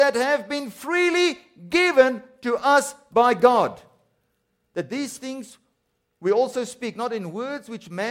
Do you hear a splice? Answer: no; 0 cuts

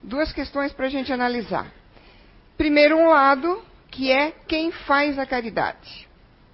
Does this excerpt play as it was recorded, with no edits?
yes; 0 cuts

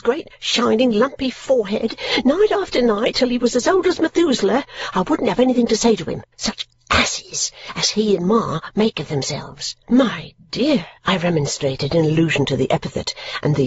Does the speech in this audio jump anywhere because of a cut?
yes; 3 cuts; at 6.3 s, 9.8 s, 11.0 s

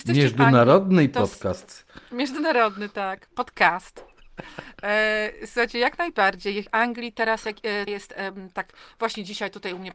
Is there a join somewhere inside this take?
yes; 3 cuts; at 2.1 s, 6.7 s, 7.9 s

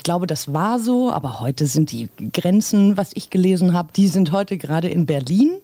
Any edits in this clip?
yes; 1 cut; at 3.9 s

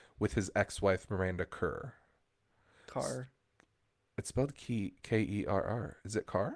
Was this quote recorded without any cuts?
yes; 0 cuts

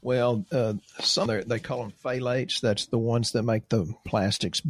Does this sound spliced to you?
yes; 1 cut; at 1.3 s

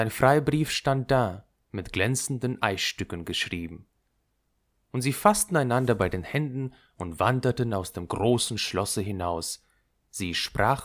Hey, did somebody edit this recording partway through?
no; 0 cuts

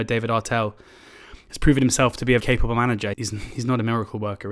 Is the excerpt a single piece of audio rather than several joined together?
no; 2 cuts; at 2.4 s, 3.1 s

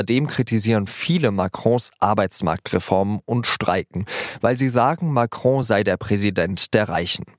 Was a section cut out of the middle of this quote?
no; 0 cuts

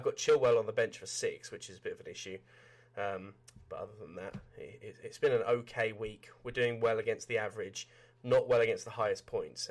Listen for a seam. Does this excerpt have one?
no; 0 cuts

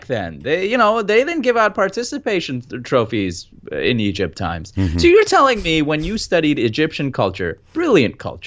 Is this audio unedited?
yes; 0 cuts

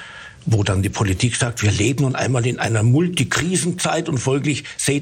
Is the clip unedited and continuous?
yes; 0 cuts

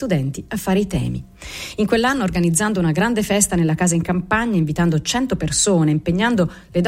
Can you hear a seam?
no; 0 cuts

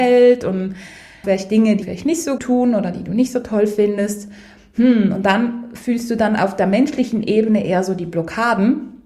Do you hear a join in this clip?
yes; 3 cuts; at 1.2 s, 1.8 s, 2.4 s

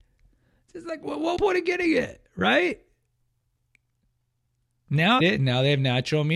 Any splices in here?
yes; 2 cuts; at 1.4 s, 5.2 s

